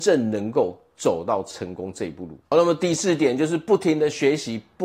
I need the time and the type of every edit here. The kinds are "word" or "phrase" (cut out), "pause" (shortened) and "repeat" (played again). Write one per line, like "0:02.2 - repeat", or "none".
0:02.4 - pause